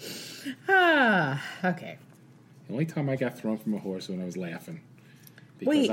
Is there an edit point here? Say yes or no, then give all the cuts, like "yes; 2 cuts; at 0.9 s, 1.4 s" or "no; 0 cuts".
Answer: no; 0 cuts